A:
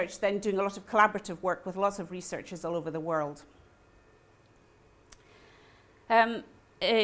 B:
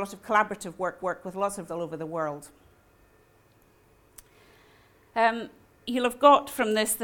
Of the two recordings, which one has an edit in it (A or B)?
B